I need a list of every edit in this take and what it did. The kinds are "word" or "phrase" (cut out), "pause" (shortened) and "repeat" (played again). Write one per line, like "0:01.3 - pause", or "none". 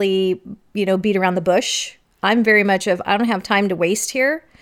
none